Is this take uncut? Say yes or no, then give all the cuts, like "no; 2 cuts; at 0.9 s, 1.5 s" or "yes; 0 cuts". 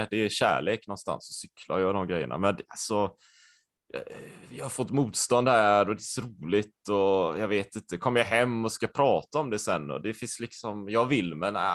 yes; 0 cuts